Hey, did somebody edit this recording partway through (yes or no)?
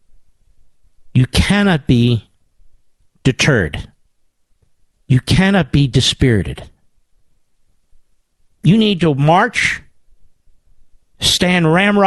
no